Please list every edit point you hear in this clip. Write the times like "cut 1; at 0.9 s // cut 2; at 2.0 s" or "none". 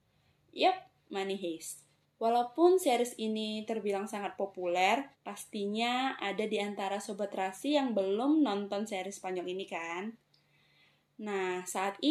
cut 1; at 2.0 s // cut 2; at 5.1 s